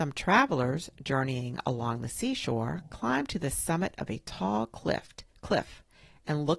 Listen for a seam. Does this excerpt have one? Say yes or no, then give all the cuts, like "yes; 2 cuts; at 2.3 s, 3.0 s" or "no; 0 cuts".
yes; 1 cut; at 5.3 s